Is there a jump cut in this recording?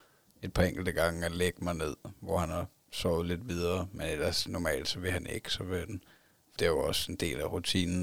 yes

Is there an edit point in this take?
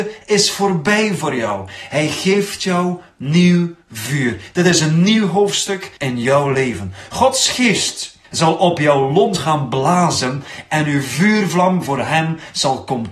yes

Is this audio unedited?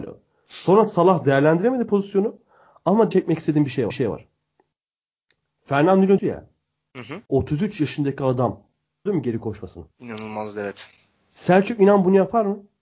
no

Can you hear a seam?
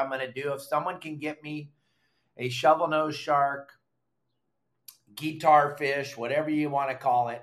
no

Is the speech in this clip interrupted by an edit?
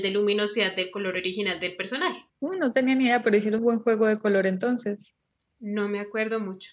yes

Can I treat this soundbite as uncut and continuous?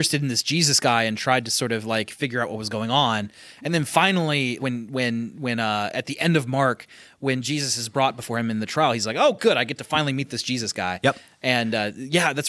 no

